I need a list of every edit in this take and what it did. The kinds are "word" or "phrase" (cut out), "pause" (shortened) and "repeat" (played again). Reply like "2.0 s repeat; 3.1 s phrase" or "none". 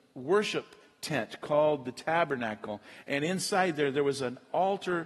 none

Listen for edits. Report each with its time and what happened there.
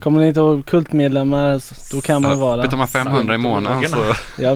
1.6 s word

